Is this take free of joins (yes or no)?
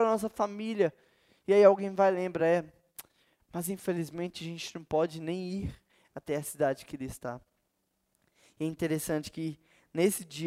yes